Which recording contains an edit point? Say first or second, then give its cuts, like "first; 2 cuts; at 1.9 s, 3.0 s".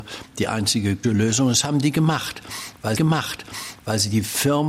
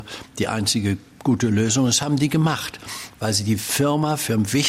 first; 2 cuts; at 1.0 s, 3.0 s